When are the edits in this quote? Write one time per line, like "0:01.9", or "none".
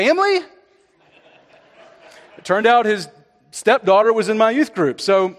none